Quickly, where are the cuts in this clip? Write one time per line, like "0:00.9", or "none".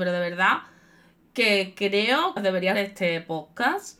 0:02.4
0:02.7